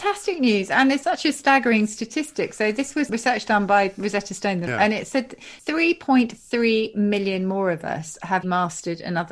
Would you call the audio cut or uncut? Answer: cut